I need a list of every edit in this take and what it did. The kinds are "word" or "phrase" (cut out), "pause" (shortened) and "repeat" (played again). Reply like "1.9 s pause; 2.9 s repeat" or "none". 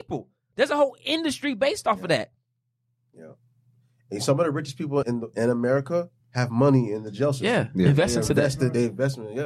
5.0 s word; 5.3 s word; 6.2 s pause